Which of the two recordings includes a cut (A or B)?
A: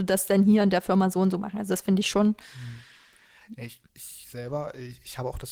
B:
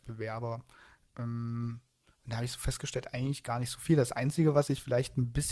A